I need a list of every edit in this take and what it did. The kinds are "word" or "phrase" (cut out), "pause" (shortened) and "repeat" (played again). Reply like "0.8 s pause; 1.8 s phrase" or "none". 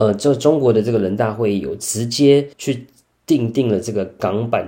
2.5 s pause